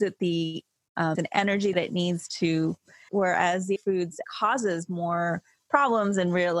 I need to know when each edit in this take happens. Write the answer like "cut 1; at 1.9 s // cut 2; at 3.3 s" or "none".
cut 1; at 1.1 s // cut 2; at 1.7 s // cut 3; at 3.1 s // cut 4; at 3.8 s // cut 5; at 4.2 s